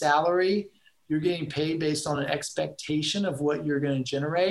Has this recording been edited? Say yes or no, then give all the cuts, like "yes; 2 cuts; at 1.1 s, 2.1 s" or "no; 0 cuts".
no; 0 cuts